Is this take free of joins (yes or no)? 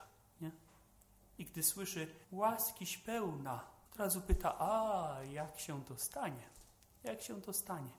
no